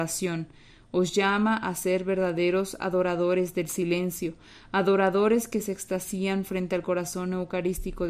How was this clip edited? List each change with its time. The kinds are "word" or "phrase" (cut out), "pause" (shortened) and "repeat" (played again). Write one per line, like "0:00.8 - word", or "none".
none